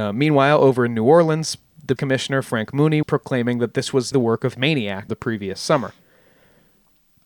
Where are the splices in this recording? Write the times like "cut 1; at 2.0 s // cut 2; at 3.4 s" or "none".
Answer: cut 1; at 2.0 s // cut 2; at 3.0 s // cut 3; at 4.1 s // cut 4; at 4.5 s // cut 5; at 5.1 s